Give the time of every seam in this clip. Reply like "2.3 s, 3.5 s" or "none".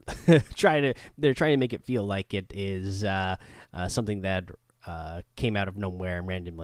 none

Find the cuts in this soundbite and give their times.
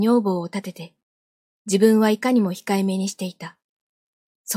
none

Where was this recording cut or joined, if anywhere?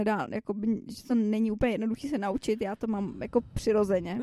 none

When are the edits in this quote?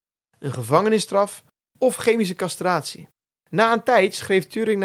3.2 s

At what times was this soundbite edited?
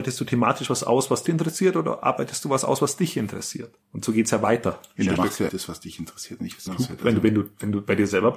1.3 s, 3.8 s, 5.2 s, 5.5 s, 6.7 s

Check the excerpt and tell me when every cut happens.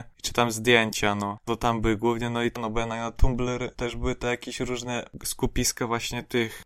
none

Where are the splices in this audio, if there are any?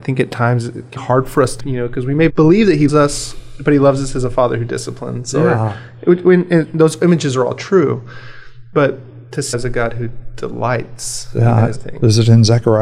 1.0 s, 1.6 s, 2.3 s, 2.9 s, 9.5 s, 11.7 s

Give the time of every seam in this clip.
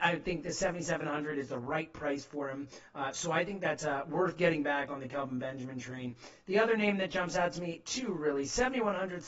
none

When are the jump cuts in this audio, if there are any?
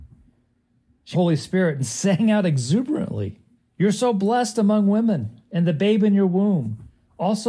1.1 s, 3.6 s

